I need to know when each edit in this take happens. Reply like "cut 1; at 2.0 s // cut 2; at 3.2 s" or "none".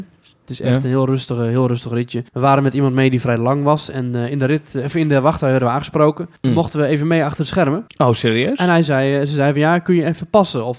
cut 1; at 2.3 s // cut 2; at 6.4 s // cut 3; at 7.9 s